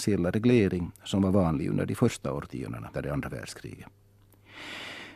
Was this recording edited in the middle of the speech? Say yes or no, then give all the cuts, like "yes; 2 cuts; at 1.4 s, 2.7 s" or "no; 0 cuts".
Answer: yes; 1 cut; at 2.9 s